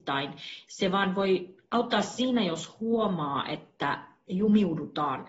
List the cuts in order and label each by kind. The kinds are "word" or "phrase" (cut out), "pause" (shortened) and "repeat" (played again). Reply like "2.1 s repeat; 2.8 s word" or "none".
none